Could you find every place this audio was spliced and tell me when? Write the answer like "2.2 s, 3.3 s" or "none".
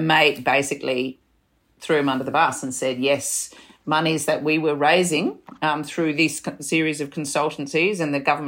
none